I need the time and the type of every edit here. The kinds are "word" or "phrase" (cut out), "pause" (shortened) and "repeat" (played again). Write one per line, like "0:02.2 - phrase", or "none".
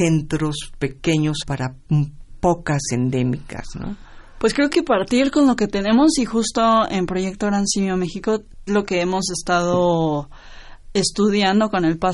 0:01.4 - word
0:02.8 - word
0:04.7 - word
0:08.7 - word